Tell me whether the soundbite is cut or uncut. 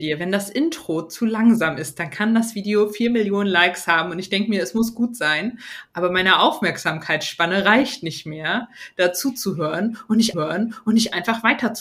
cut